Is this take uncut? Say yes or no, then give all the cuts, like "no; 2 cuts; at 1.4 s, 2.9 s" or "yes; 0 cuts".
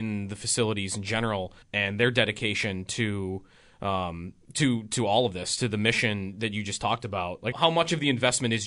no; 2 cuts; at 1.6 s, 7.5 s